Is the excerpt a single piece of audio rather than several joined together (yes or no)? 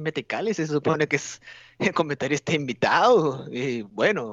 yes